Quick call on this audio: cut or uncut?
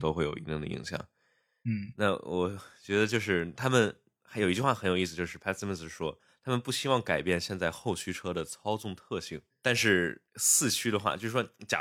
uncut